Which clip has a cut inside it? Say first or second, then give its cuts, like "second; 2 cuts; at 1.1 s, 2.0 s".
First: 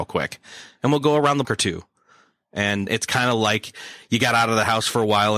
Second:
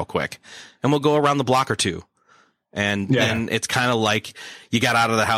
first; 2 cuts; at 1.4 s, 2.9 s